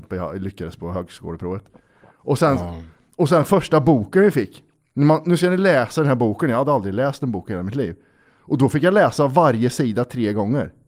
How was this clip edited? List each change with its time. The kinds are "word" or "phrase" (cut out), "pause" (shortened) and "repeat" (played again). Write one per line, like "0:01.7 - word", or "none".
none